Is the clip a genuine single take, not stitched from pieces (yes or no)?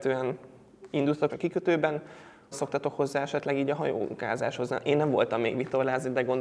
no